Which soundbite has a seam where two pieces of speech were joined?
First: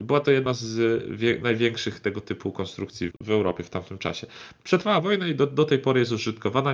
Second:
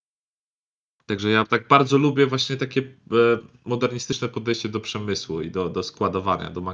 first; 1 cut; at 3.1 s

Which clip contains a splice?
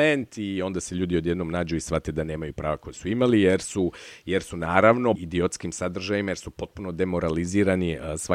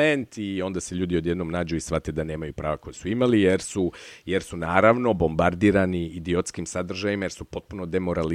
first; 1 cut; at 5.1 s

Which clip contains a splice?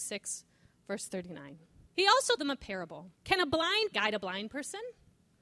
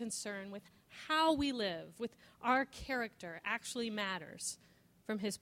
first; 4 cuts; at 1.9 s, 2.4 s, 3.1 s, 3.9 s

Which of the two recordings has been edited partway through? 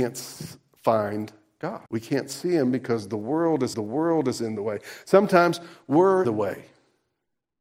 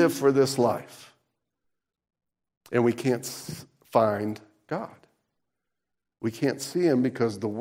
first; 3 cuts; at 1.9 s, 3.7 s, 6.2 s

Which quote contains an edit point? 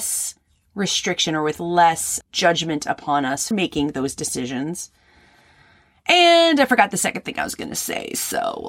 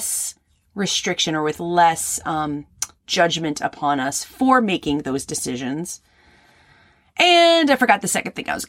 first; 2 cuts; at 2.2 s, 3.5 s

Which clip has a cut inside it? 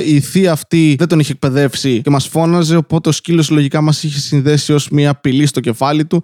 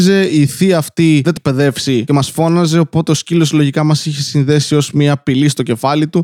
second; 1 cut; at 1.4 s

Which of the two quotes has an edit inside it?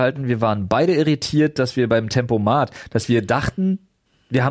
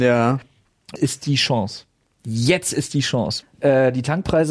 second; 3 cuts; at 1.0 s, 2.1 s, 3.4 s

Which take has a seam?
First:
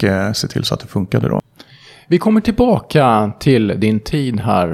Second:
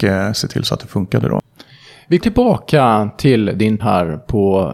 second; 2 cuts; at 2.2 s, 3.8 s

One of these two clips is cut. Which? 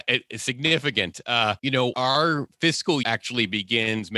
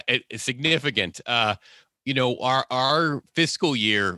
first; 3 cuts; at 1.6 s, 1.9 s, 3.0 s

